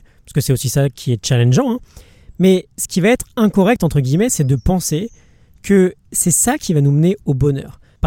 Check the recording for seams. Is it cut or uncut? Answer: uncut